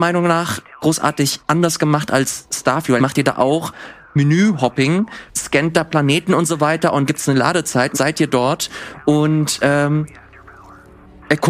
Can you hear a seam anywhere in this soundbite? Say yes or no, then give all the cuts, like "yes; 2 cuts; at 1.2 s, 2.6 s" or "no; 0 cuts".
yes; 4 cuts; at 3.0 s, 5.3 s, 7.1 s, 7.9 s